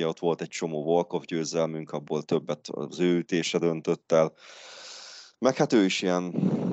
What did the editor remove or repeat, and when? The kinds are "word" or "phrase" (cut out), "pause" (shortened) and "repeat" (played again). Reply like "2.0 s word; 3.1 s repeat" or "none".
none